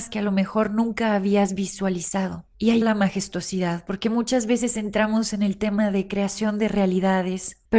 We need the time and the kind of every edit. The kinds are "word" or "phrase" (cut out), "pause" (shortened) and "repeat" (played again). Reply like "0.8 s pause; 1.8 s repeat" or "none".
2.8 s word

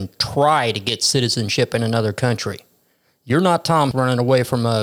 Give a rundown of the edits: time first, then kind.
3.9 s word

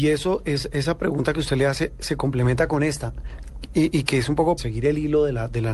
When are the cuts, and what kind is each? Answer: 4.6 s word

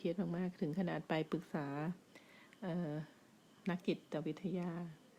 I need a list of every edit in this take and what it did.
none

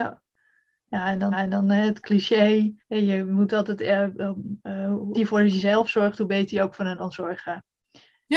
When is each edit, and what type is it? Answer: 1.3 s repeat; 2.8 s pause; 5.1 s word; 7.0 s word

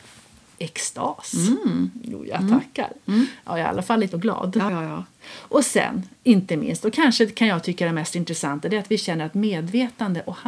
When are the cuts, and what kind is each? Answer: 4.1 s word; 4.7 s word; 6.2 s pause

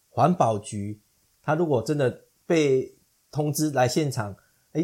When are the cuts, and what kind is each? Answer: none

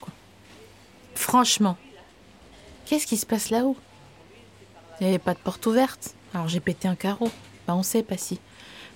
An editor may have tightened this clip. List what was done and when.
none

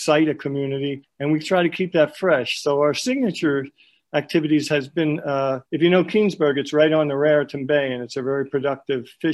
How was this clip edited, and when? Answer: 5.7 s pause

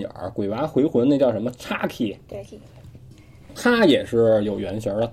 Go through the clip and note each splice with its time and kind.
2.4 s word

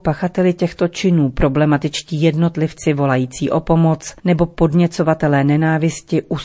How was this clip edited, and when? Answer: 4.2 s pause

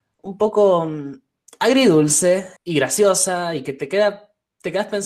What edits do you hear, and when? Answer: 2.6 s pause

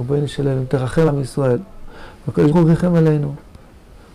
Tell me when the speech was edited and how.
1.1 s word; 2.5 s word

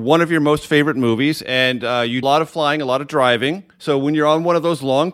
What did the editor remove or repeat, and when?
2.2 s phrase; 3.7 s pause

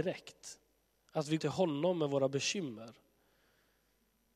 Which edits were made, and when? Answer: 1.4 s word

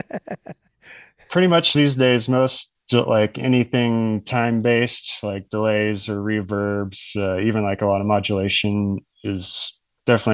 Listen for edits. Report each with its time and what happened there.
none

